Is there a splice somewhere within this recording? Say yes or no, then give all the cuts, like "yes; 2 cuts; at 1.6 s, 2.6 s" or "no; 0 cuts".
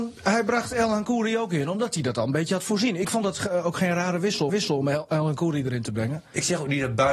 yes; 1 cut; at 4.5 s